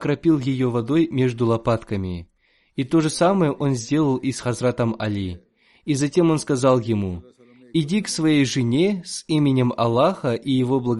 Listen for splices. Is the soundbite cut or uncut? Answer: uncut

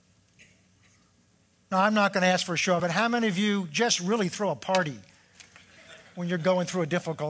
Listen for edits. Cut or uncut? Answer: cut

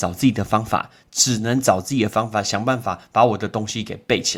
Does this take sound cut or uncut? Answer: uncut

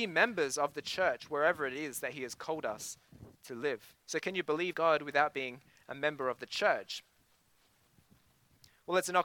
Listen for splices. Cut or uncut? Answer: cut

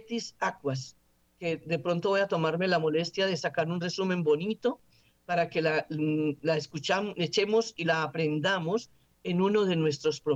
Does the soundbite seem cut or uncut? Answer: uncut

